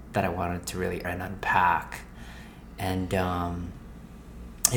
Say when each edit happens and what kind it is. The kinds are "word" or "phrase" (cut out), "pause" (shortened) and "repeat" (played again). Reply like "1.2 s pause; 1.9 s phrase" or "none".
1.0 s word